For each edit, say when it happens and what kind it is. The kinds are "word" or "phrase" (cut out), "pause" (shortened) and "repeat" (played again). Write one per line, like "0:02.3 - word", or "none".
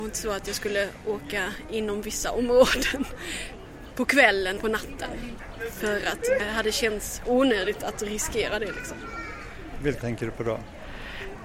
0:04.6 - word
0:06.4 - word
0:10.0 - word